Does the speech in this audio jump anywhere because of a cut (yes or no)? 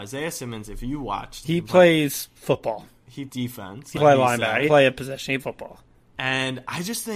yes